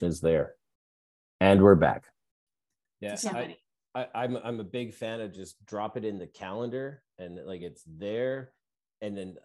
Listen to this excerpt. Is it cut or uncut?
uncut